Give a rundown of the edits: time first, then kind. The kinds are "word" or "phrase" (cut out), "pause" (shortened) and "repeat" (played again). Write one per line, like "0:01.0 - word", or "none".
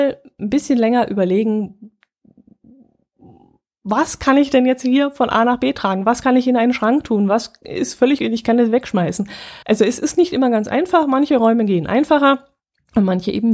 0:08.2 - word
0:09.6 - pause